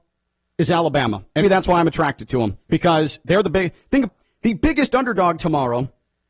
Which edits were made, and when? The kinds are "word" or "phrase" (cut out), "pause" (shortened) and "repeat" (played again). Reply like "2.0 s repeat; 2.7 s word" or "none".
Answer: 1.4 s word; 2.6 s pause; 4.1 s word

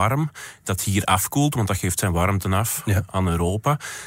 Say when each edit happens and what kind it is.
none

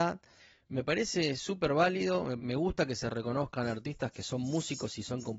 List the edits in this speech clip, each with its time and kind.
2.4 s word; 4.1 s word

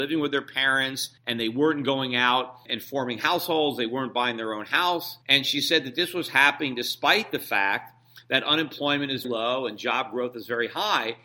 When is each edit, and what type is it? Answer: 1.2 s pause; 2.7 s word; 5.2 s pause; 9.2 s word

